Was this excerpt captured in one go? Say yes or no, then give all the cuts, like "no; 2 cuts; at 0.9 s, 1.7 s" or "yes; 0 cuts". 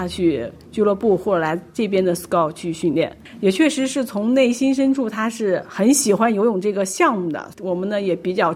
yes; 0 cuts